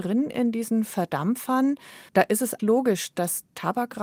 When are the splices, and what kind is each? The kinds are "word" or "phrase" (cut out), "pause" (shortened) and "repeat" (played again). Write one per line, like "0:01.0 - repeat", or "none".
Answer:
0:02.1 - pause
0:02.6 - word